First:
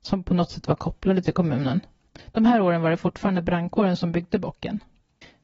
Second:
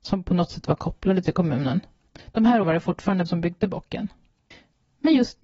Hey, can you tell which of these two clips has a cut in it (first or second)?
second